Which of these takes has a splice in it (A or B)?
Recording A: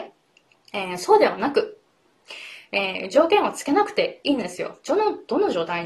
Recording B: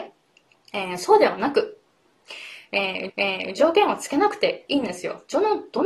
B